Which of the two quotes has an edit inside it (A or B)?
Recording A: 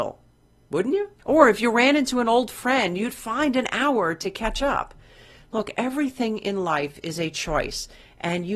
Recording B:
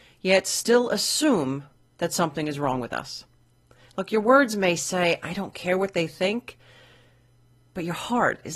A